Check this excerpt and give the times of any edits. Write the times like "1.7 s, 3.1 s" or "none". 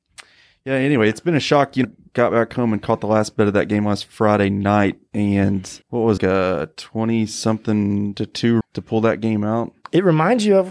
1.8 s, 5.8 s, 6.2 s, 8.6 s